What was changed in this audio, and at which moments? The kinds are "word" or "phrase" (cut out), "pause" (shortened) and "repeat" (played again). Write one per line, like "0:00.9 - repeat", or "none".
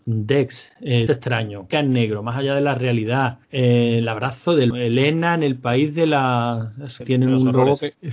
0:01.1 - word
0:01.7 - word
0:03.4 - pause
0:04.7 - word
0:07.0 - word